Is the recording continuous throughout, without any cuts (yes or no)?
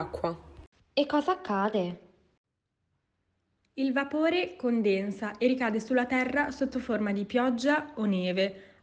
yes